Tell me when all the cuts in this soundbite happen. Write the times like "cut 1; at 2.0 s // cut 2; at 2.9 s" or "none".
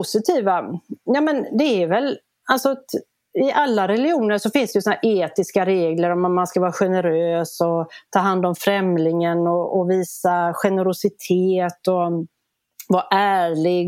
none